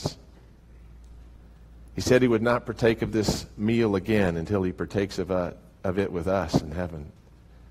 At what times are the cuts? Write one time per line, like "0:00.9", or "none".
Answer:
none